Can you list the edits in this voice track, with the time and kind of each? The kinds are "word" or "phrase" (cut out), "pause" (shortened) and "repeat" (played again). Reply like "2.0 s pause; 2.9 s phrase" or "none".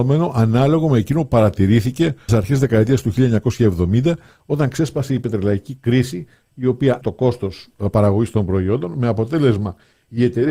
2.3 s word; 7.0 s word